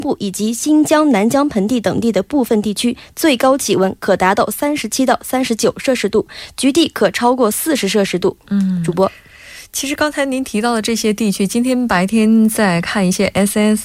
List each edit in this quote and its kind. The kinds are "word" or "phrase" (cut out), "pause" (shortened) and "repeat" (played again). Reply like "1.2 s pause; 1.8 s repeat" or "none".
8.4 s pause